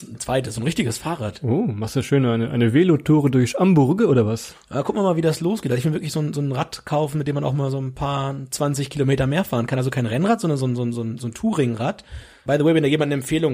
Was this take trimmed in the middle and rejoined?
no; 0 cuts

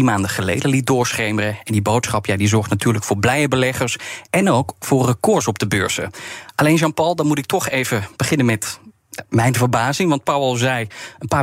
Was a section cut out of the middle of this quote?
no; 0 cuts

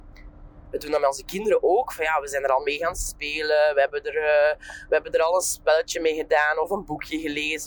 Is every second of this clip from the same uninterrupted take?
yes; 0 cuts

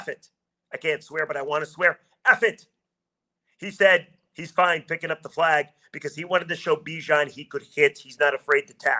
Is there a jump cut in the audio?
no; 0 cuts

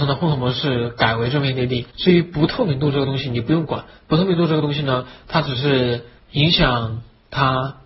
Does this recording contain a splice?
yes; 2 cuts; at 1.9 s, 6.2 s

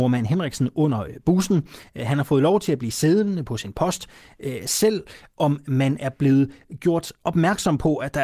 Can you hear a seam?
no; 0 cuts

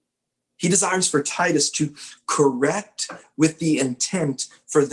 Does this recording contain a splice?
no; 0 cuts

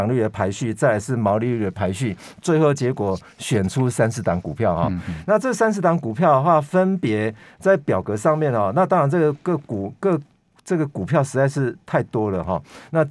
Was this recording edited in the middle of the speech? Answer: no; 0 cuts

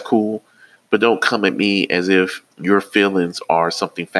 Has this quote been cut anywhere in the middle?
yes; 1 cut; at 2.5 s

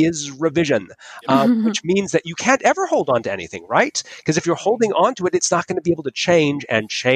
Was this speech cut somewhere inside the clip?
no; 0 cuts

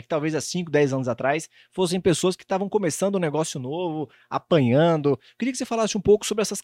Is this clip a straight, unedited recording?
yes; 0 cuts

